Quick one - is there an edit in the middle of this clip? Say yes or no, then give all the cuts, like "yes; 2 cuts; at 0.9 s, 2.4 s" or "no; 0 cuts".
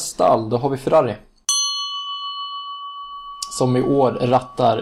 no; 0 cuts